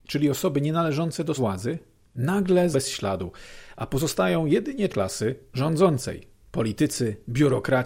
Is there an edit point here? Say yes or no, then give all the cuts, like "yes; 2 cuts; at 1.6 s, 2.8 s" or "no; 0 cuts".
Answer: yes; 3 cuts; at 1.4 s, 2.7 s, 4.9 s